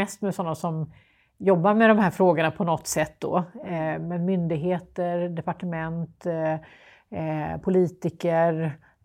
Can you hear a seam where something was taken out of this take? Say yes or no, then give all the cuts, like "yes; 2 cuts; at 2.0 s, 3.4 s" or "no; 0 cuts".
no; 0 cuts